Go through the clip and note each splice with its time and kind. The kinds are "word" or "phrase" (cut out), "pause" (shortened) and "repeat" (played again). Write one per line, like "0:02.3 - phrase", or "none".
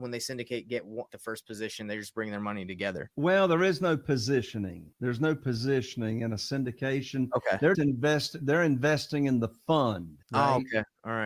0:01.1 - word
0:04.9 - pause
0:07.7 - word
0:10.2 - pause

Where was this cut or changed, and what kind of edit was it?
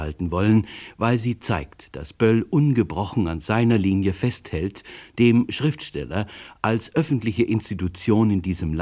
none

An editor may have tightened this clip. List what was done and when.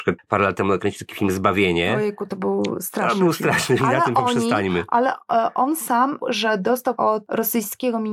0:02.3 - word
0:03.8 - word
0:06.2 - word
0:07.0 - word

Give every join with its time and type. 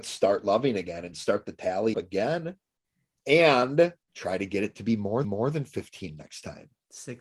0:01.9 - word
0:04.0 - pause
0:05.2 - repeat

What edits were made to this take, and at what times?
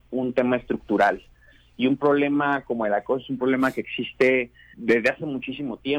0:04.7 - word

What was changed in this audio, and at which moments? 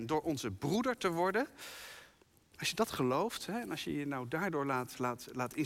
none

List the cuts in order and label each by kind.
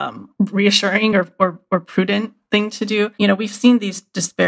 none

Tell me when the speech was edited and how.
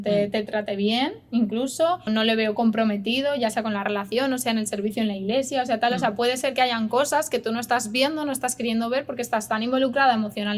0:02.1 - word

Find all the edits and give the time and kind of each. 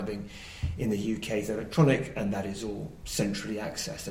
none

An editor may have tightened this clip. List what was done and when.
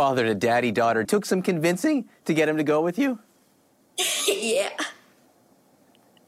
0:01.0 - phrase

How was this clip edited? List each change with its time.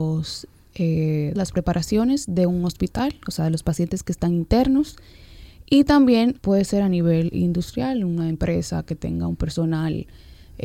0:01.4 - phrase
0:06.4 - word

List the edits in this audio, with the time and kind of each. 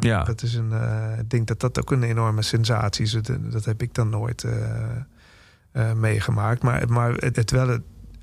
0:07.3 - word

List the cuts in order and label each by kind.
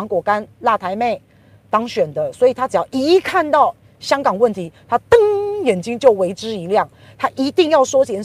none

